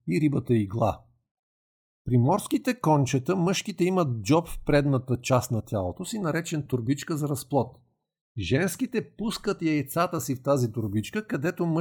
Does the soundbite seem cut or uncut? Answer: uncut